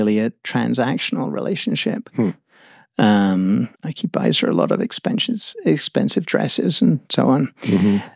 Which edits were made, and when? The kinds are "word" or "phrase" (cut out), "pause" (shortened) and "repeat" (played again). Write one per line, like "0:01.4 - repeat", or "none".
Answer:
0:03.7 - pause